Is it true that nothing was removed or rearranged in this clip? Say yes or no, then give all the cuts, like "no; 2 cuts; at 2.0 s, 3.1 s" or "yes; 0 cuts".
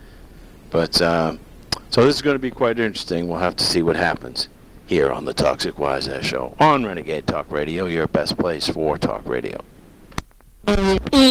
yes; 0 cuts